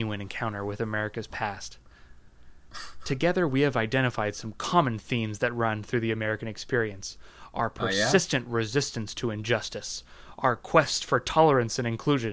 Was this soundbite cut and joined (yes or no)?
no